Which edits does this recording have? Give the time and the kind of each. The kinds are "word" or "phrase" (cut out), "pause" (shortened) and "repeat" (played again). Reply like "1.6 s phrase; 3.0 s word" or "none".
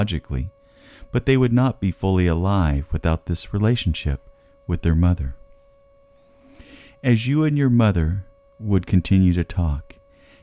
none